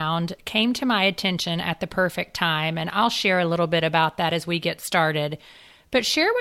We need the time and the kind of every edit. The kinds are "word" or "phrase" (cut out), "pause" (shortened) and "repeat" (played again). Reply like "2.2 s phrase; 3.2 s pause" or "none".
none